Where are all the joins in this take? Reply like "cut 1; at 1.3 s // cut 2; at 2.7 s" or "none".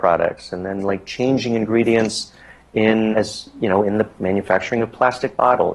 cut 1; at 3.1 s